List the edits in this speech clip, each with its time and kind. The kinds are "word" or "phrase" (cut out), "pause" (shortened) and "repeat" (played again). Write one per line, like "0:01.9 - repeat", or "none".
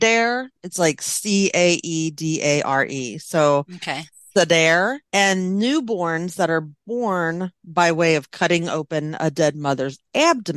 0:05.1 - pause